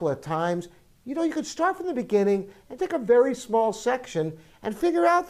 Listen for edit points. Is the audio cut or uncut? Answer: cut